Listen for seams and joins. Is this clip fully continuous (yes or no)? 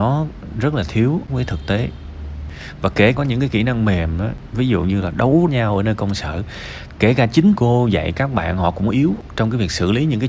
no